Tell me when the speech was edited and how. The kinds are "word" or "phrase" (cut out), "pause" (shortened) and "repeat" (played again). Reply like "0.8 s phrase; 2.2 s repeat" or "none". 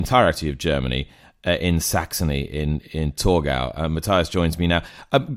none